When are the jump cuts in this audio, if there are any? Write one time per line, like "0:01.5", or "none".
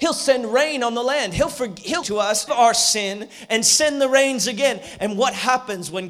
0:02.0
0:02.5

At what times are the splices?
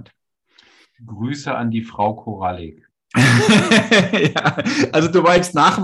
none

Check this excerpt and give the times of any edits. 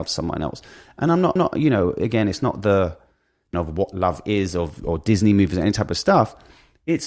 0:01.4
0:03.5

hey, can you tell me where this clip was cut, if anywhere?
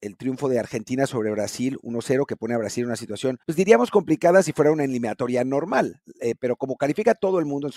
0:03.4

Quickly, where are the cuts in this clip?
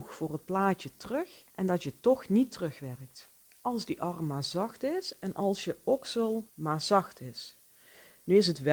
0:01.5
0:03.4
0:06.5

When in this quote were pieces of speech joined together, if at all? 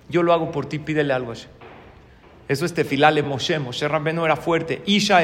none

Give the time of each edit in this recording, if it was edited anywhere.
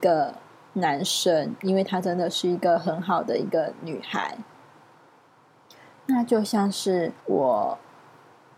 0:07.2

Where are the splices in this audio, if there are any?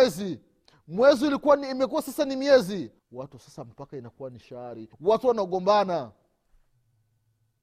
0:03.0
0:04.9

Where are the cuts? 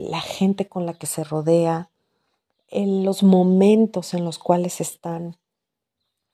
none

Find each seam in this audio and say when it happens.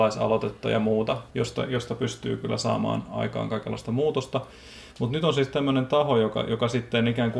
0:01.3

